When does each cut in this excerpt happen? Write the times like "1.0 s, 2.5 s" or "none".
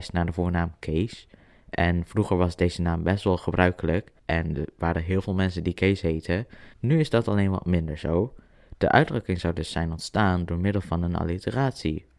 4.2 s, 6.7 s